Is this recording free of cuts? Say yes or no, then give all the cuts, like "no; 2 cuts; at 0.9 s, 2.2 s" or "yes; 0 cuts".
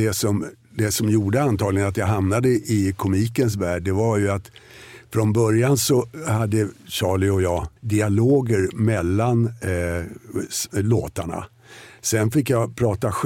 no; 1 cut; at 7.8 s